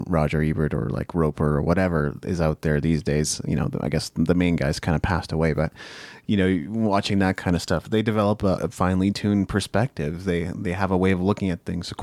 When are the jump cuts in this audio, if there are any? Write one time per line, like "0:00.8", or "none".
0:08.6